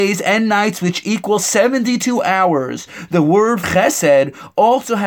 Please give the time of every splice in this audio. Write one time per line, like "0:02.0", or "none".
0:03.6